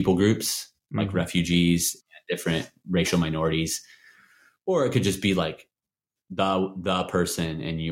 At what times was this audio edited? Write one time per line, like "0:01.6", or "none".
none